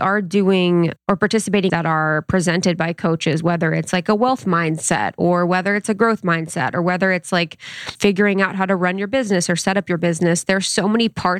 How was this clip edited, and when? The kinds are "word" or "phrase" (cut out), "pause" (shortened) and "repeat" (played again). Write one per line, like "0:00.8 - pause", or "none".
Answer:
0:01.7 - phrase